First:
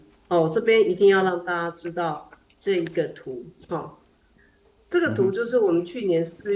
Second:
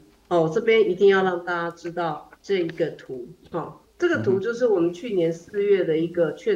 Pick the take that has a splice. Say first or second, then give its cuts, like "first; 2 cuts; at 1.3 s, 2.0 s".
second; 2 cuts; at 2.4 s, 3.8 s